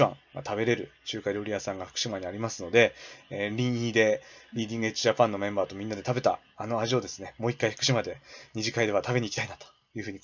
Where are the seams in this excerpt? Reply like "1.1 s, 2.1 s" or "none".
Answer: none